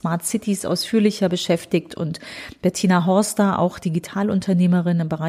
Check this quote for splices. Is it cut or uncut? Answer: uncut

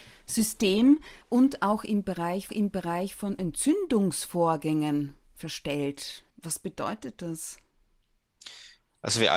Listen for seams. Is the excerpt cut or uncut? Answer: cut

